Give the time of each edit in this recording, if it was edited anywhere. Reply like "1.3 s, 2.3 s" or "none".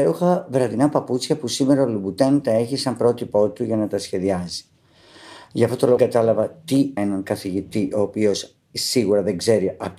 6.0 s, 7.0 s

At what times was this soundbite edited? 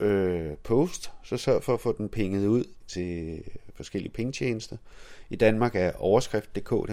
2.8 s

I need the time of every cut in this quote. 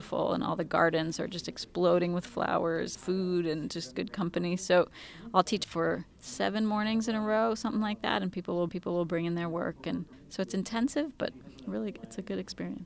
2.9 s, 5.6 s, 6.1 s, 8.7 s, 10.1 s, 11.6 s

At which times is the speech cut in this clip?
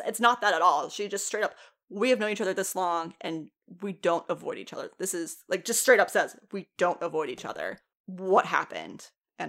none

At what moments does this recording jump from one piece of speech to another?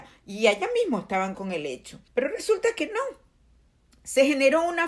1.3 s, 2.1 s

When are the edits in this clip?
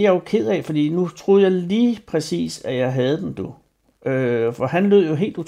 none

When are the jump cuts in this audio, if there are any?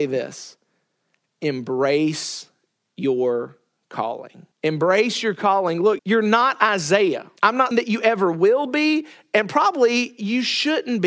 4.5 s, 6.0 s, 7.4 s, 7.7 s

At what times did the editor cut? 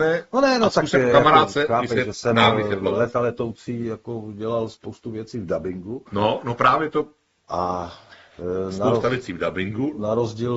none

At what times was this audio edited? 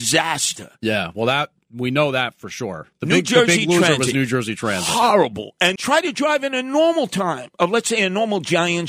5.8 s

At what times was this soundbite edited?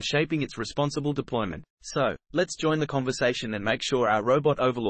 1.7 s

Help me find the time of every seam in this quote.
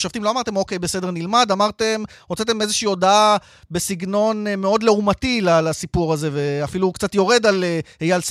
none

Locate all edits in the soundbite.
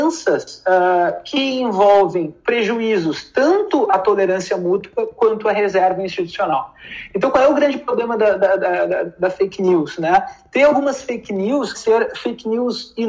11.7 s

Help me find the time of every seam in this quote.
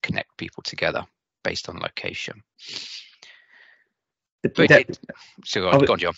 4.7 s

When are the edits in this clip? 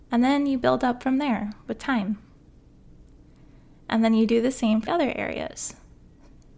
4.9 s

